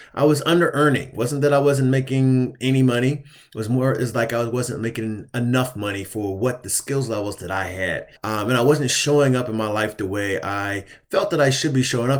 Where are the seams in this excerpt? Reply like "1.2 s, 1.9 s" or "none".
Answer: 8.2 s